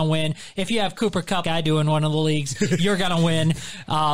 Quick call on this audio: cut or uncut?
cut